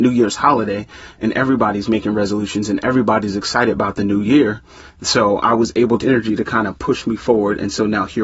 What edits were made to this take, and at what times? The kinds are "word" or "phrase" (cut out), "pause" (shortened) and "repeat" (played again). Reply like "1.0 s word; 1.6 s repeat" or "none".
6.0 s phrase